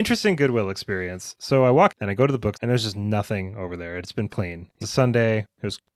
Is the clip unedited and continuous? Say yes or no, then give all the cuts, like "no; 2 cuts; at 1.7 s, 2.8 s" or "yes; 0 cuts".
no; 4 cuts; at 1.9 s, 2.5 s, 4.3 s, 4.8 s